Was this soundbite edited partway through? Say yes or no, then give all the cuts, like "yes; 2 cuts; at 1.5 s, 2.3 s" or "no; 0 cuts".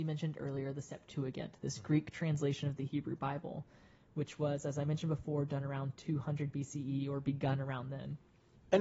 no; 0 cuts